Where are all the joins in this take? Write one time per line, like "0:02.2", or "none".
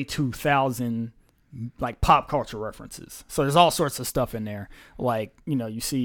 none